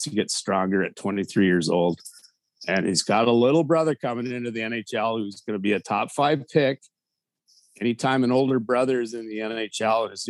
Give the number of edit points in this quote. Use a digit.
0